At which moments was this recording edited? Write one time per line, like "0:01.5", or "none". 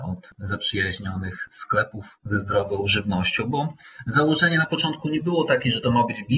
none